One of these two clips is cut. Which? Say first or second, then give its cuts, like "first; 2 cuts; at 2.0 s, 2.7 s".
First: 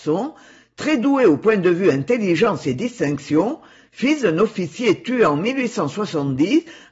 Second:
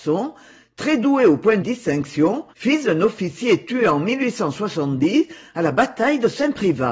second; 2 cuts; at 1.6 s, 2.5 s